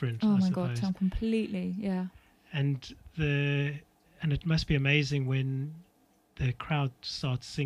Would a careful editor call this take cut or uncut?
uncut